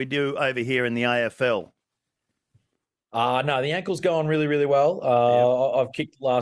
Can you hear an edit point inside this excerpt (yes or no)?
no